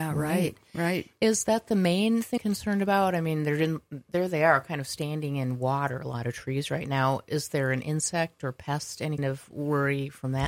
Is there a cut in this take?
yes; 2 cuts; at 2.4 s, 9.2 s

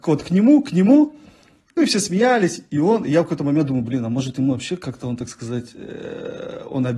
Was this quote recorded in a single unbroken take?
yes; 0 cuts

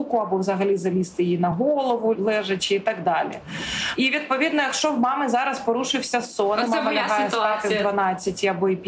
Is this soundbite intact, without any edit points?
yes; 0 cuts

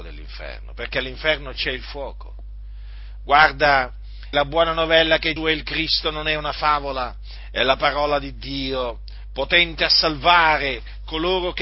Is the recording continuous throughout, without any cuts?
no; 2 cuts; at 4.3 s, 5.4 s

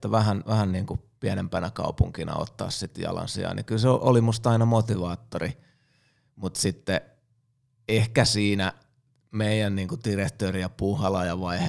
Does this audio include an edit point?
no; 0 cuts

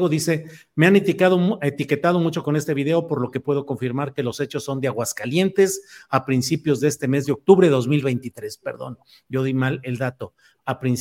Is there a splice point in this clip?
no; 0 cuts

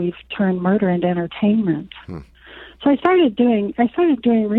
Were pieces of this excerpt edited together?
no; 0 cuts

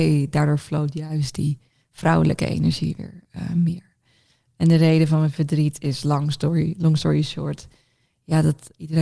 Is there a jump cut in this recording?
no; 0 cuts

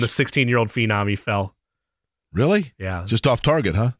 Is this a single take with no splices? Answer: yes; 0 cuts

